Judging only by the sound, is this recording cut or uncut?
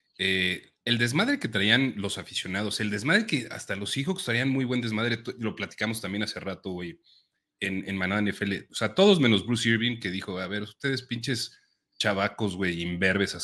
uncut